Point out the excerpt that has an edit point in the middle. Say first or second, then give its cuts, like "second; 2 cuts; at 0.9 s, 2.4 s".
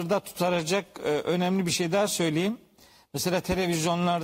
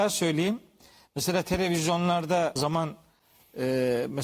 second; 1 cut; at 2.6 s